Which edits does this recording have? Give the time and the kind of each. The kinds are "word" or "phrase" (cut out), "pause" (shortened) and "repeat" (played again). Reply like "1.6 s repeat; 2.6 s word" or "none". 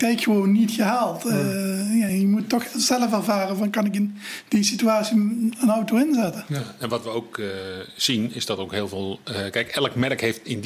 none